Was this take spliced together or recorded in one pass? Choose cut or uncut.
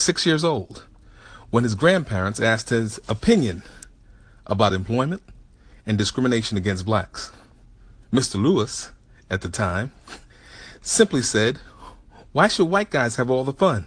uncut